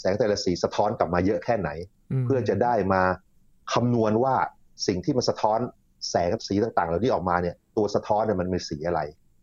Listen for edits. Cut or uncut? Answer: uncut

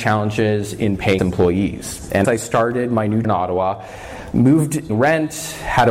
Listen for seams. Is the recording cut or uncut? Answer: cut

